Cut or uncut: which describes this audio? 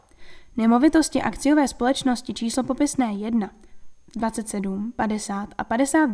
uncut